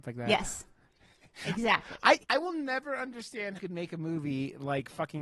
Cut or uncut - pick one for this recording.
cut